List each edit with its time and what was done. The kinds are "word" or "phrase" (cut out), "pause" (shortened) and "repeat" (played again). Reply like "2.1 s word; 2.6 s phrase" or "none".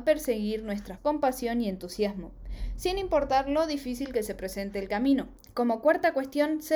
1.0 s phrase